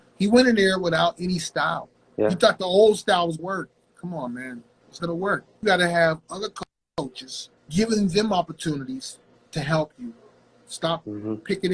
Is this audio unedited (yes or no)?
no